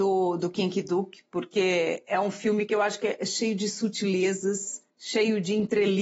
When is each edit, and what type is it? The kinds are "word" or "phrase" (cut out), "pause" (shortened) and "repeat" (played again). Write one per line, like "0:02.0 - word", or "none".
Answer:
0:04.9 - pause